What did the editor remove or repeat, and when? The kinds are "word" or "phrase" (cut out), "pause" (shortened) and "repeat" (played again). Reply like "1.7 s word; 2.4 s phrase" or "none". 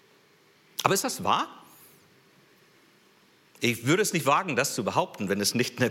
none